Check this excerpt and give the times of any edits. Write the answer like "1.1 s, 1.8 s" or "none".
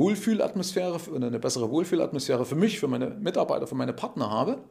none